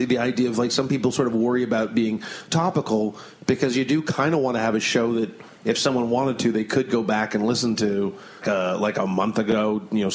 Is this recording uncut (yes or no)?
no